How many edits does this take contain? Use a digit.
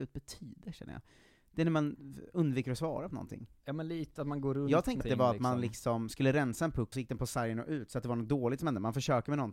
2